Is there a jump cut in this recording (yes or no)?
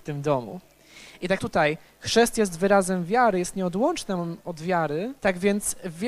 yes